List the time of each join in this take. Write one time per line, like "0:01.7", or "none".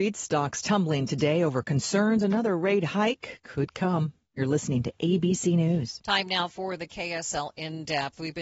none

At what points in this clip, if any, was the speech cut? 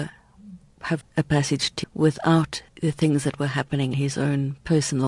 0:01.0
0:01.8
0:02.7
0:03.9

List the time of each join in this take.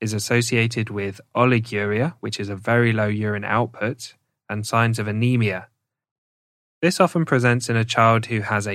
none

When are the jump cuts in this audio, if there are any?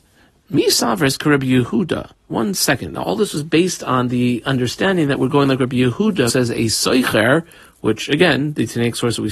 0:06.3

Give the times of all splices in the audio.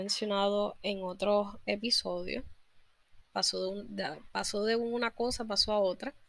none

